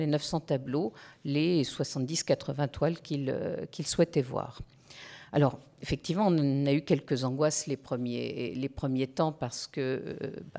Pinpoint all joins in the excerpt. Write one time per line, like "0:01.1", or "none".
none

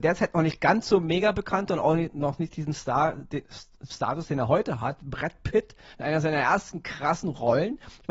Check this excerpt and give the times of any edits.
0:03.9

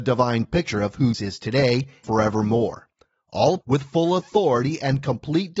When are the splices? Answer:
0:01.1
0:02.0
0:03.6

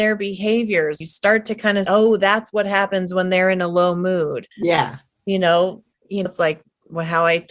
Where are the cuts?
0:01.0
0:01.9
0:04.5
0:06.3

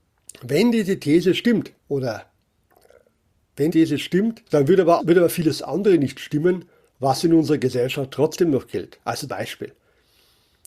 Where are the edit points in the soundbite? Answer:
0:01.8
0:03.7
0:04.5
0:05.0
0:06.9
0:09.3

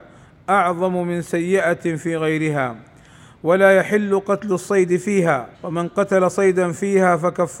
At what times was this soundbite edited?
0:05.5

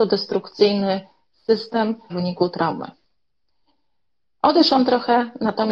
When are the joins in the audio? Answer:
0:02.1

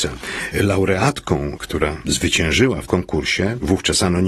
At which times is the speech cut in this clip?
0:02.9

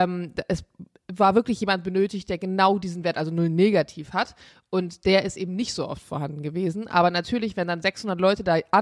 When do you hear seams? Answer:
none

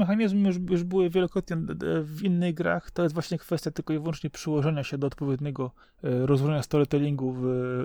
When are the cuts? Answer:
0:05.8

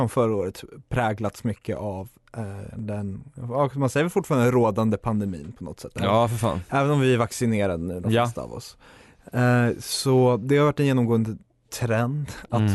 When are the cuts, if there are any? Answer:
none

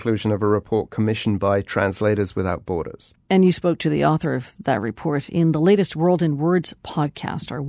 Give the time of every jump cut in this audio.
none

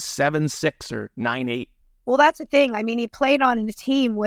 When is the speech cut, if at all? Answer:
0:01.8

